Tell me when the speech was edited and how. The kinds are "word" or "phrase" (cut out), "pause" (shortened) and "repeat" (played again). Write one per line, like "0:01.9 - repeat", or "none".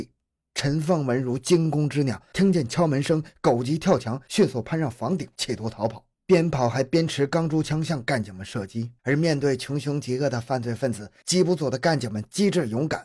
0:06.1 - pause
0:09.0 - pause